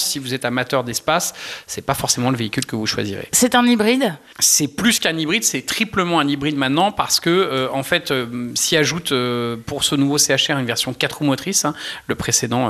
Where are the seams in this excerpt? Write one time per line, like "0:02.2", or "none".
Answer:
none